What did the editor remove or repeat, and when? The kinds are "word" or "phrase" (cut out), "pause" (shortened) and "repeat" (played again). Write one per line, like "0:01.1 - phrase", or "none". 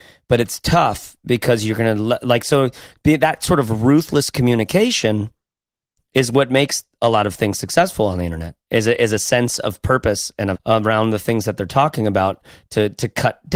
0:10.6 - word